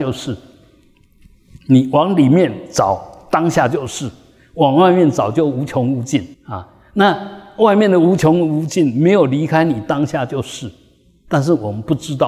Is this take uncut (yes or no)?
no